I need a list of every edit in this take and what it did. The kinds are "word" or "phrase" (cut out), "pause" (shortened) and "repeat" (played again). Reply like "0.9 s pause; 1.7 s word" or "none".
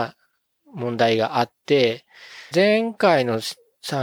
2.5 s word